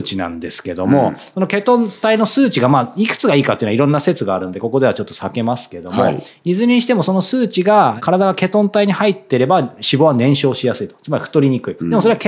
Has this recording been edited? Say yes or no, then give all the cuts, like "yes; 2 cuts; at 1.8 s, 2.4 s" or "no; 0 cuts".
no; 0 cuts